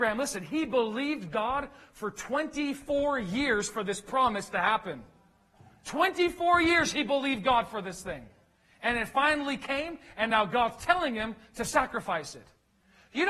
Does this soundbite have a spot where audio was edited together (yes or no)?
no